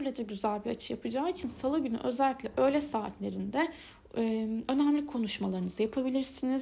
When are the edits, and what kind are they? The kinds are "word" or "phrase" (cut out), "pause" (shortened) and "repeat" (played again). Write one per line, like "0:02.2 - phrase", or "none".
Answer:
none